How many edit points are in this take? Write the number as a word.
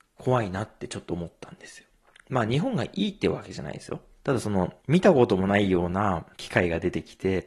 two